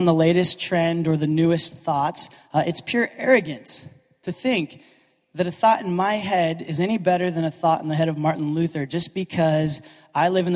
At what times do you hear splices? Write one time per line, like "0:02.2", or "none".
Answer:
none